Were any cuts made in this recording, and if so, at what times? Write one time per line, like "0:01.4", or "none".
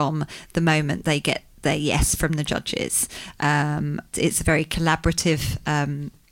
0:04.1